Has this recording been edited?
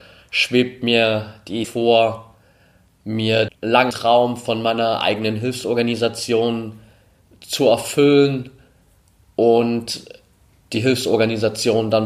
yes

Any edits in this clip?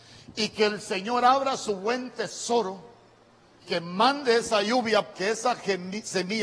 yes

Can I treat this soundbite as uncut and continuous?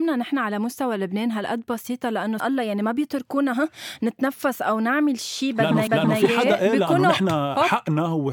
no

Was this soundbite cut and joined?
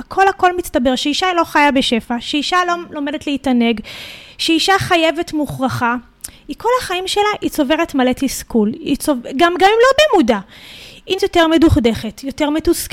yes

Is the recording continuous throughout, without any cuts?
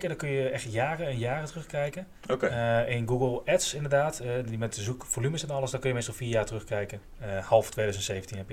yes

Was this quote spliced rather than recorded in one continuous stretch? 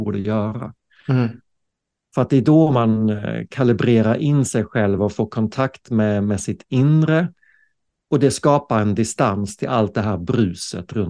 no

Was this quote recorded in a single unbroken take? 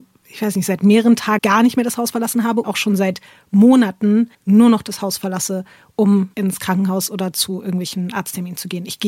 no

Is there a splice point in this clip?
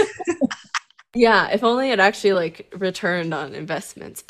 no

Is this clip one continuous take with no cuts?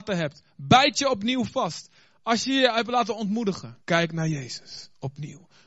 no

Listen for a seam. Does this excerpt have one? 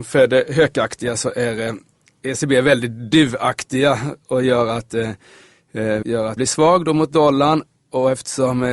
yes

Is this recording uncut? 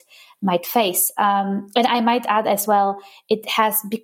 yes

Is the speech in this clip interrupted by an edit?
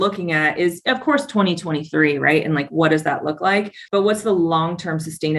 yes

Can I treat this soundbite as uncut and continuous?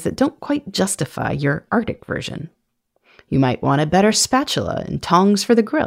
yes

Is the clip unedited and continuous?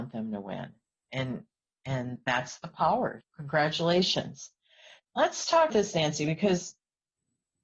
no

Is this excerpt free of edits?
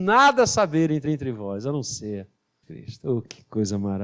no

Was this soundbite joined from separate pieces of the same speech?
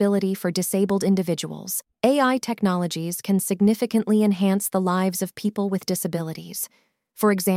yes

